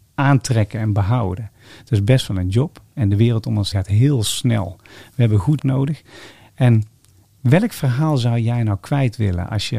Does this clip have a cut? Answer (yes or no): yes